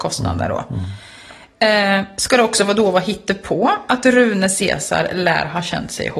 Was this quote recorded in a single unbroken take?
yes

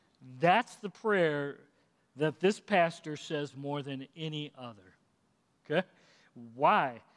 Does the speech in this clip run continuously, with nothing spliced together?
yes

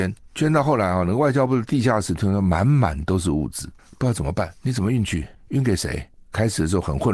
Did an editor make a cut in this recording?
yes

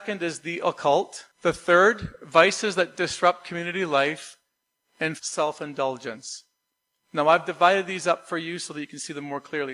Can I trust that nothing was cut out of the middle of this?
no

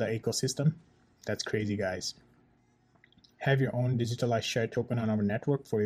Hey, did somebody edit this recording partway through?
no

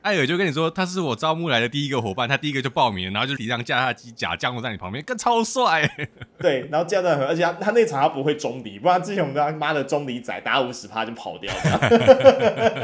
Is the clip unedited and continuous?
no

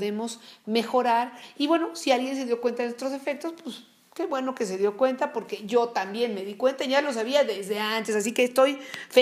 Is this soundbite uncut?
yes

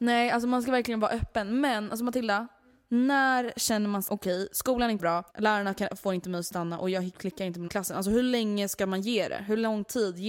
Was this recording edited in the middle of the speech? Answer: yes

